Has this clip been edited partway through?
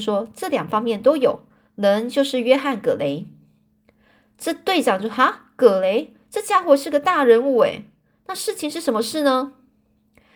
no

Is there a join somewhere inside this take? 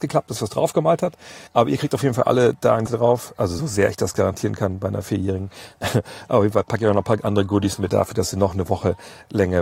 yes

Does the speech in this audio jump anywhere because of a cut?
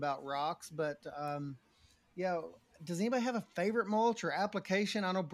no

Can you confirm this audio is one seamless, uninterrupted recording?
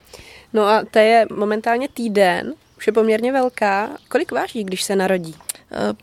yes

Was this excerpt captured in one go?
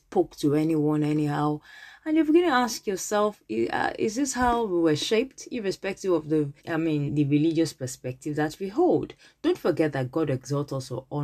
no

